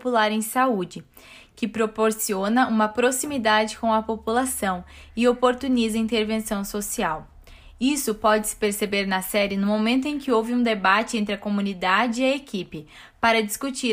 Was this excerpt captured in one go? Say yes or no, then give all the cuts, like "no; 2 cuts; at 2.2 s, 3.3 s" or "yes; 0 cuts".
yes; 0 cuts